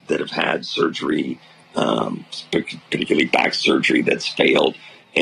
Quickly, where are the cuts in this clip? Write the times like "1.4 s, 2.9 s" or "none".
none